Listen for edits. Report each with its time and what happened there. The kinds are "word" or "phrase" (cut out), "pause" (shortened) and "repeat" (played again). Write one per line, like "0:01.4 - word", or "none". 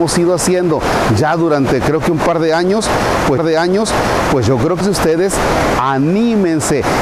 0:03.4 - repeat
0:04.8 - word